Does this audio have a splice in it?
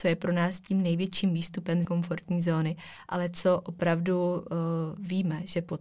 yes; 1 cut; at 1.8 s

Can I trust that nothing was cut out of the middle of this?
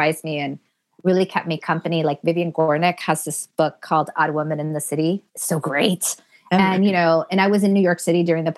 yes; 0 cuts

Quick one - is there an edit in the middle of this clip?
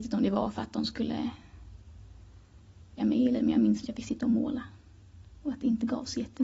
yes; 3 cuts; at 3.0 s, 3.4 s, 3.8 s

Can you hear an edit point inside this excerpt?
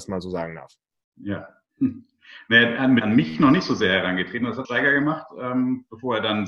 yes; 2 cuts; at 3.0 s, 4.6 s

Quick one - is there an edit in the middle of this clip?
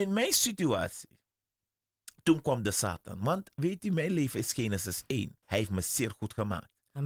yes; 1 cut; at 5.4 s

